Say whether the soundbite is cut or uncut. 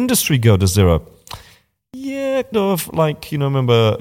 cut